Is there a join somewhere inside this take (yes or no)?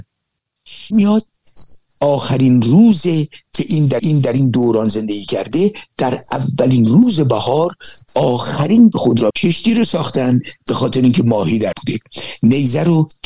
yes